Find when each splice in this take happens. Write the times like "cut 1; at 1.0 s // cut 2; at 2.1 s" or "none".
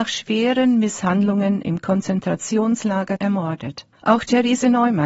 cut 1; at 3.2 s // cut 2; at 3.9 s